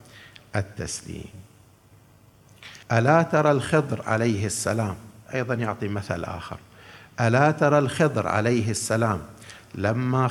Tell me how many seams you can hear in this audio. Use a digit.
1